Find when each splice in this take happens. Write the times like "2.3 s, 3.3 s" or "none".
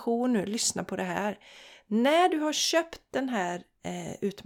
none